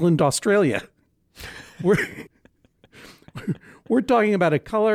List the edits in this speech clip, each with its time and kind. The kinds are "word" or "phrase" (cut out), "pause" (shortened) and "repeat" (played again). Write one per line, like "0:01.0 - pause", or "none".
0:02.3 - pause